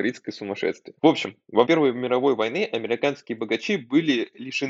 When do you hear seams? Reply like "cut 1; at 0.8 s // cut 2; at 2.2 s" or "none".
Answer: cut 1; at 1.0 s // cut 2; at 1.7 s